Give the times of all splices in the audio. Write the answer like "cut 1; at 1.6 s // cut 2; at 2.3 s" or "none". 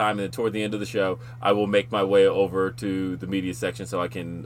none